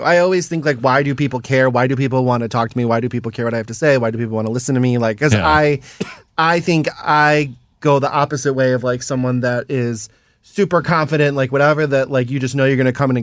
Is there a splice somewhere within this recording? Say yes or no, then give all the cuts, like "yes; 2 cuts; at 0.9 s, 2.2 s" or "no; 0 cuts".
no; 0 cuts